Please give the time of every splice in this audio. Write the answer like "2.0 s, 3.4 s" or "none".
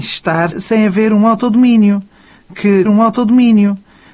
2.9 s